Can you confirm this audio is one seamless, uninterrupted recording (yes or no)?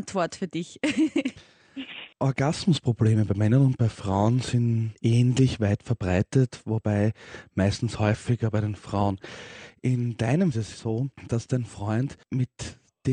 no